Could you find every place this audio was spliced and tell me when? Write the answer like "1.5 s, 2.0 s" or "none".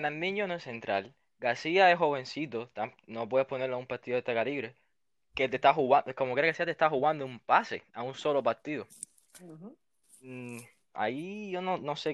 none